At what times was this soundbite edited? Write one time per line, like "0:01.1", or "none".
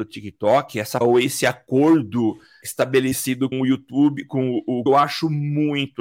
0:01.0
0:02.6
0:03.5
0:04.9